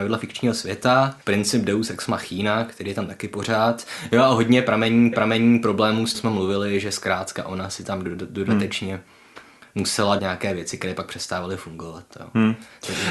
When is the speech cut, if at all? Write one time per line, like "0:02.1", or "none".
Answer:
0:01.2
0:05.1
0:06.1
0:10.2